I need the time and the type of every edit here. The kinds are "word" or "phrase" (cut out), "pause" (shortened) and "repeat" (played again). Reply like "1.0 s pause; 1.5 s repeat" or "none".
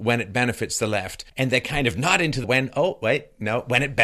1.3 s pause; 2.4 s word